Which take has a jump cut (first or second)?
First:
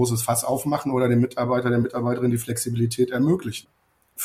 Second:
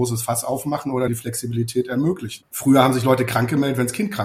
second